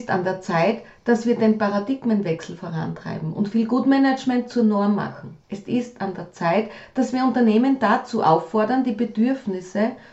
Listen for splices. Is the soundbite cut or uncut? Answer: cut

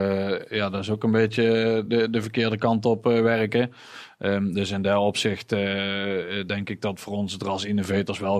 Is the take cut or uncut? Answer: uncut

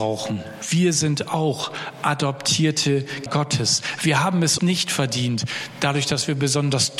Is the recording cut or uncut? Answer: cut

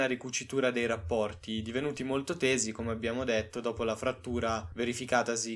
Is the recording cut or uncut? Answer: uncut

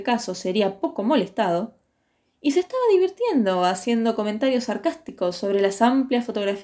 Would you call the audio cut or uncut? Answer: uncut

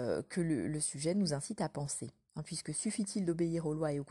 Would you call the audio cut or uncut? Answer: uncut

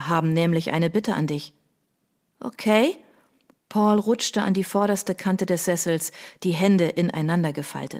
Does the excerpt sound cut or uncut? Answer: uncut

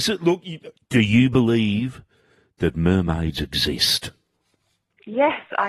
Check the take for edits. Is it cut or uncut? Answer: uncut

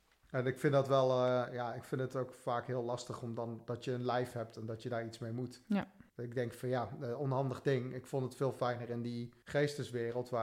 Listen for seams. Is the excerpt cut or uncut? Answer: cut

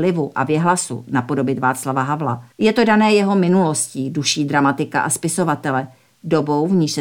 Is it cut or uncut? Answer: cut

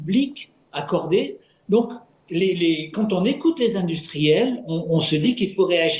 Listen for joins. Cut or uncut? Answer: uncut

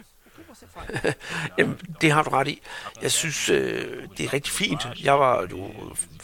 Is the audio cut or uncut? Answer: uncut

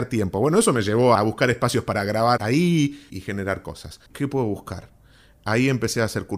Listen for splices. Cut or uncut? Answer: cut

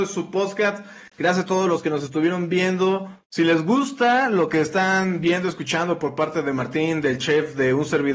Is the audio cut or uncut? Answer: cut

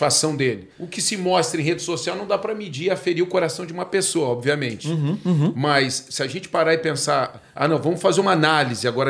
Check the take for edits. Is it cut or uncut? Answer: uncut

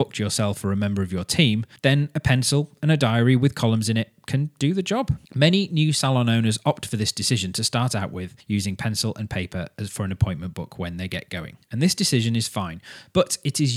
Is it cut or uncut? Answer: cut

